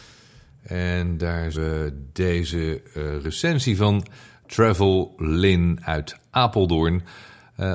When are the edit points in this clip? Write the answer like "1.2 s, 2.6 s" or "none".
1.5 s

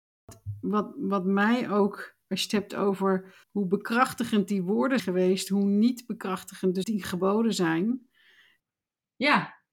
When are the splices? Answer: 2.2 s, 3.4 s, 5.0 s, 6.8 s

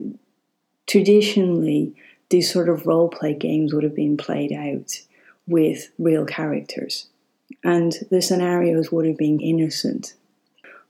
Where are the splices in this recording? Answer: 9.4 s

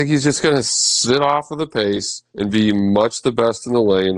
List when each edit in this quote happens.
none

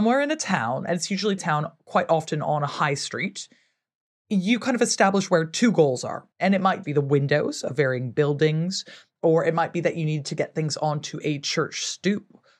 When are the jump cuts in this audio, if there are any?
1.4 s, 6.3 s, 6.8 s

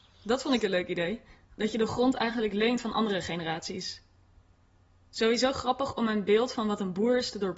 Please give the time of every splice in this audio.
none

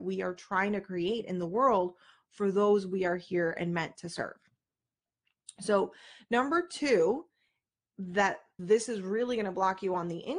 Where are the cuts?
none

